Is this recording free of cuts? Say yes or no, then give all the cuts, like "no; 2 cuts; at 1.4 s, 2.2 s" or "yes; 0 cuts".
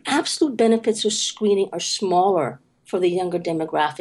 yes; 0 cuts